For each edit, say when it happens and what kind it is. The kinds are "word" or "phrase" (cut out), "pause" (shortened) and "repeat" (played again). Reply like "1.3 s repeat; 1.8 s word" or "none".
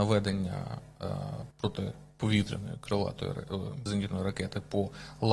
1.5 s pause; 3.9 s word